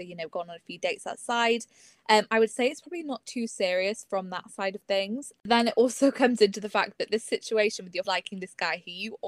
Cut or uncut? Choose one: cut